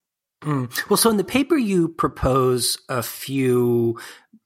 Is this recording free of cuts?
yes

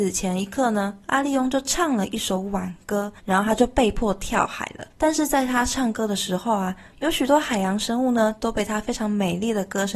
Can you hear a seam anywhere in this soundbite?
yes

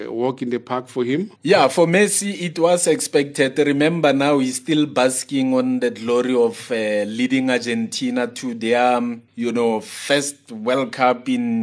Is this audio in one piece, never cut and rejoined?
no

